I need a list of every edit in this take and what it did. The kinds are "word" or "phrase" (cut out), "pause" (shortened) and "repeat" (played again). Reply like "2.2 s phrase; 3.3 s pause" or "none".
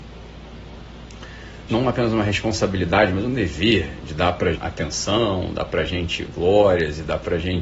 1.7 s word; 4.5 s word